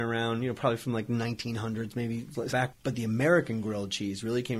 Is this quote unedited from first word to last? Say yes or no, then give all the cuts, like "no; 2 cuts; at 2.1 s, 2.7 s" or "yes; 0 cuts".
no; 1 cut; at 2.5 s